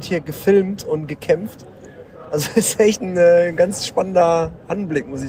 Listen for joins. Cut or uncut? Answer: uncut